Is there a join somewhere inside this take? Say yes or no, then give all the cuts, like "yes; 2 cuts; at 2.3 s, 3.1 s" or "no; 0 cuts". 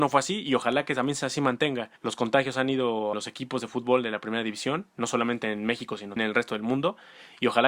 yes; 3 cuts; at 2.0 s, 3.1 s, 6.2 s